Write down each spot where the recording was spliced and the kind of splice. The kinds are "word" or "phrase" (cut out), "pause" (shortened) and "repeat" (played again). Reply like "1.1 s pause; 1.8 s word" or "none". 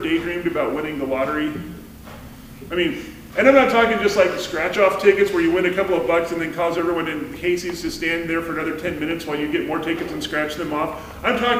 none